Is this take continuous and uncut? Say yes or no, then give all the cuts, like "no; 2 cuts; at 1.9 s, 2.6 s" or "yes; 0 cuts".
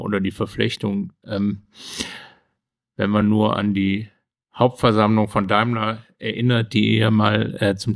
yes; 0 cuts